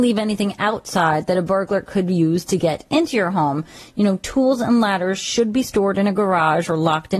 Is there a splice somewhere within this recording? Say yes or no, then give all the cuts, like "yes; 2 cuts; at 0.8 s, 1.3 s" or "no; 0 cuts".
no; 0 cuts